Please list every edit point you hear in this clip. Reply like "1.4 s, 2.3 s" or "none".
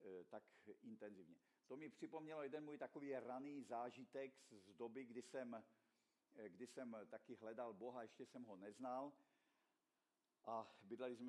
none